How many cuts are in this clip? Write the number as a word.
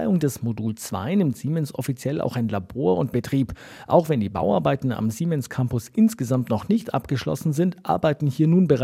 one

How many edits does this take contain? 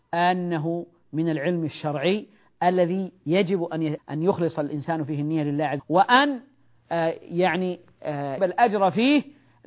three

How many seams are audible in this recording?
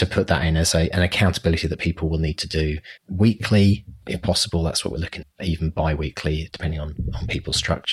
two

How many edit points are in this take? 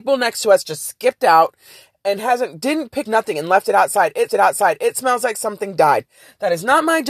two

